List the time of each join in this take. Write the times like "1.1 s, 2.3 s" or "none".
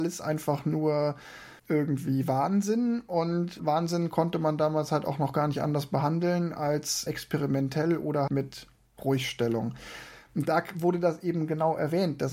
1.6 s, 3.6 s, 7.1 s, 8.3 s